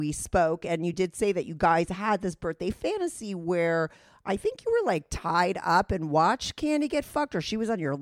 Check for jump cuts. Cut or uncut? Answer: uncut